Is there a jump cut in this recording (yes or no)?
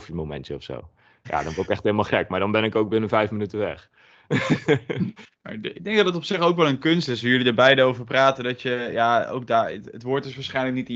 no